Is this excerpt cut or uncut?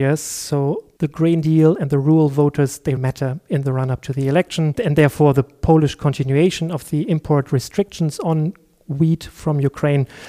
cut